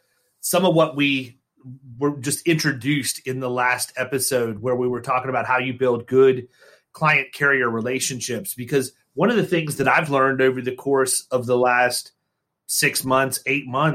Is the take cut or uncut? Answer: uncut